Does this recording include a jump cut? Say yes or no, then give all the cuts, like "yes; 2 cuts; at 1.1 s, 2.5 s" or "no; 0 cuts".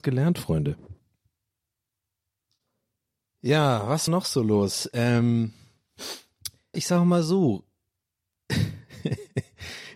yes; 2 cuts; at 4.1 s, 6.7 s